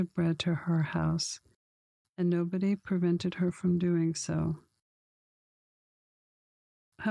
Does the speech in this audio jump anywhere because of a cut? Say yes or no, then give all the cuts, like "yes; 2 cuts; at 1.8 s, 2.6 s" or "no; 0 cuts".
no; 0 cuts